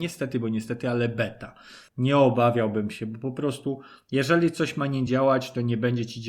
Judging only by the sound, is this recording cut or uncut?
uncut